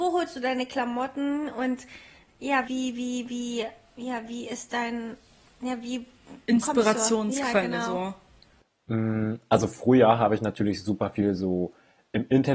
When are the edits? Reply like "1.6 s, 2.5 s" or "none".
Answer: 2.7 s

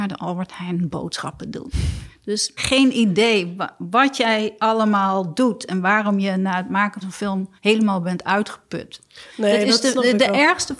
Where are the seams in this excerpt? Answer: 2.6 s, 7.0 s, 7.6 s

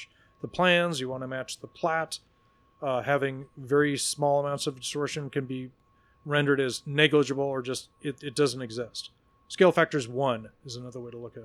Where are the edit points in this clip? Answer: none

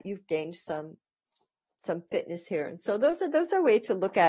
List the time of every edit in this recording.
none

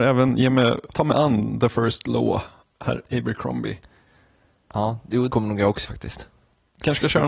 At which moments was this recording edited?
0.9 s, 2.6 s, 5.3 s, 5.8 s

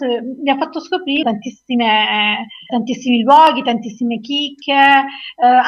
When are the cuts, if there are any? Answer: 1.2 s, 2.7 s

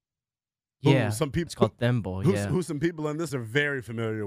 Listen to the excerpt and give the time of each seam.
1.5 s, 3.3 s

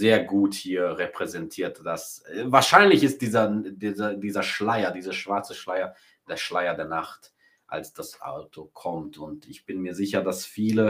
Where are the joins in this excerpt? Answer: none

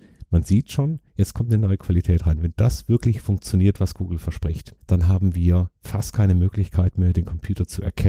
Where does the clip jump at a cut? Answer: 1.1 s, 4.8 s

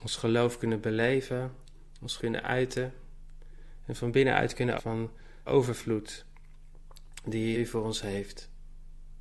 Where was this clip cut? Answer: 2.2 s, 4.8 s, 5.5 s, 7.5 s

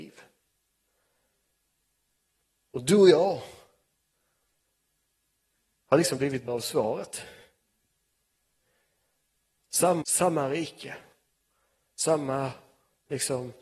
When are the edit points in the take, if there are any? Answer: 6.5 s, 10.0 s

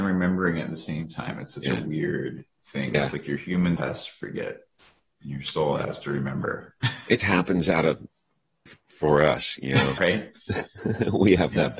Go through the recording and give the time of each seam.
3.8 s, 7.2 s, 8.7 s, 10.0 s

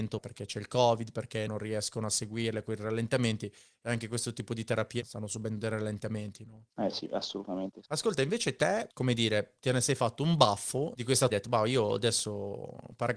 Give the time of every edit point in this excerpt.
7.8 s, 11.3 s

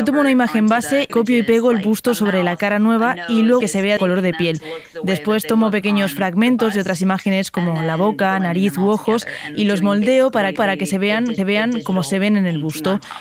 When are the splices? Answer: 1.1 s, 3.6 s, 4.0 s, 10.6 s, 11.4 s

